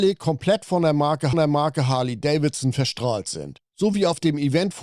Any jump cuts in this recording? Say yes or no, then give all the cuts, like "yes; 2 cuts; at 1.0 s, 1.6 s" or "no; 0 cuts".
yes; 1 cut; at 1.3 s